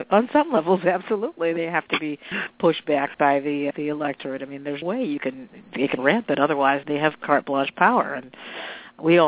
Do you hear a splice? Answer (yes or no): yes